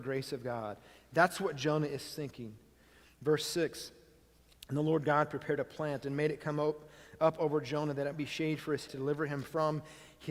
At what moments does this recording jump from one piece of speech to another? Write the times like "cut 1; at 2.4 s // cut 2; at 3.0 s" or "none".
cut 1; at 8.1 s // cut 2; at 8.9 s